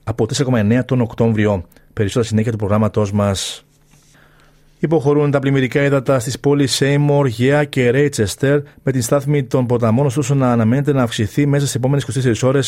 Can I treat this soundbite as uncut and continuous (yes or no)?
no